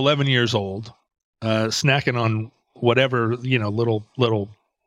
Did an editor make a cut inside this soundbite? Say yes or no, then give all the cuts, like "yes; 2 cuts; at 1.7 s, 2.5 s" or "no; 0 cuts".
no; 0 cuts